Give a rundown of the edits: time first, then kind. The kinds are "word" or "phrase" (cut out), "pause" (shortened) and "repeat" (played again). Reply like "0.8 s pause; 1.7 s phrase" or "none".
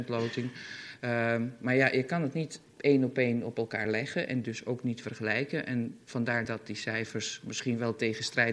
none